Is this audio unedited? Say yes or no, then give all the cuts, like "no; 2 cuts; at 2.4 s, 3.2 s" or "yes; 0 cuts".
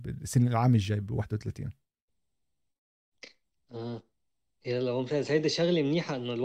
yes; 0 cuts